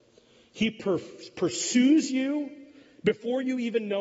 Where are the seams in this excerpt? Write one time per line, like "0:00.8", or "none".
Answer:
none